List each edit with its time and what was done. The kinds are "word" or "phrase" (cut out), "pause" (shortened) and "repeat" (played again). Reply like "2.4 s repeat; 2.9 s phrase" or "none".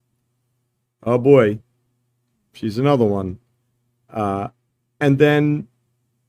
none